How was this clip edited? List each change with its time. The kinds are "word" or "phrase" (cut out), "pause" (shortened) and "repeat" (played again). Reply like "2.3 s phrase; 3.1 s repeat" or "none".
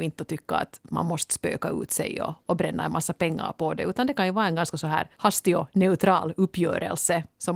5.1 s pause